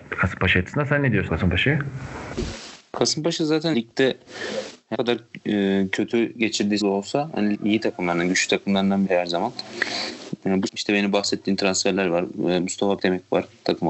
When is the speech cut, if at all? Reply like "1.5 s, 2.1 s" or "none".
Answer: 1.3 s, 3.7 s, 4.9 s, 6.8 s, 7.5 s, 9.1 s, 10.7 s, 13.0 s